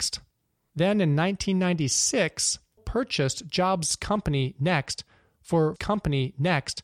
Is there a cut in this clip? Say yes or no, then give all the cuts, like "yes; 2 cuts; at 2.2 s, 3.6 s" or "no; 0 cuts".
yes; 2 cuts; at 2.8 s, 5.8 s